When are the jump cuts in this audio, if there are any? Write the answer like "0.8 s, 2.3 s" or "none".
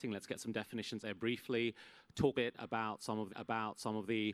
1.0 s, 2.3 s, 3.3 s